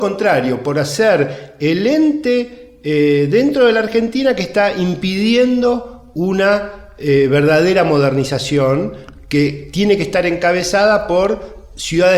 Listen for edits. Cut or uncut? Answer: uncut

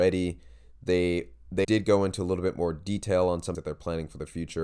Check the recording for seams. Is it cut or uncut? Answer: cut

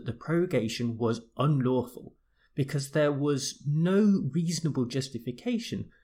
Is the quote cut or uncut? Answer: uncut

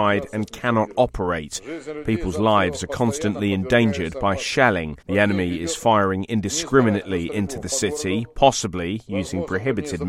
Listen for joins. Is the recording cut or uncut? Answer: cut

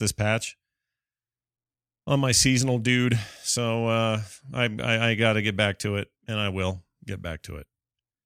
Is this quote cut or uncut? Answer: cut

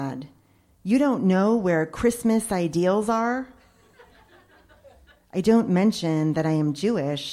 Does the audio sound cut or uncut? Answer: uncut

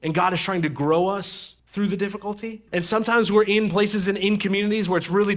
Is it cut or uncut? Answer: cut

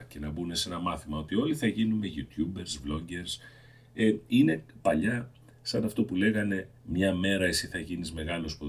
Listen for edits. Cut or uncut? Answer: cut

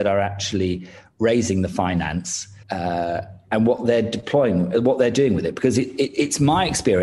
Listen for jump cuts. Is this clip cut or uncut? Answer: cut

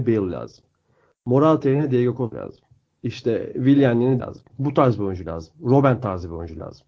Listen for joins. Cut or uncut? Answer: cut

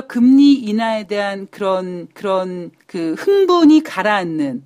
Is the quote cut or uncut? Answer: cut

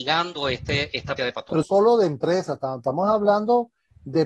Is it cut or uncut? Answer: cut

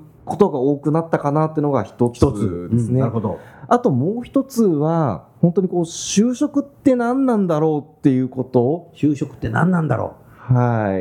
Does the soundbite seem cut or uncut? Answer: cut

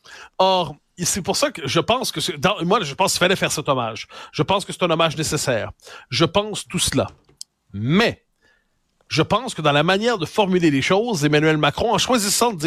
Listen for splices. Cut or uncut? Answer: uncut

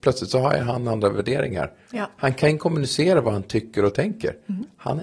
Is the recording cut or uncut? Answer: uncut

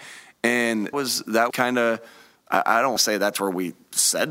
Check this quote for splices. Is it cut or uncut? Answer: cut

